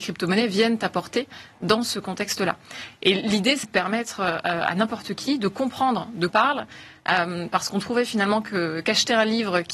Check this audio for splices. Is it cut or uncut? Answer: cut